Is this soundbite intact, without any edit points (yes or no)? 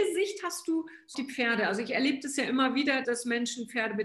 no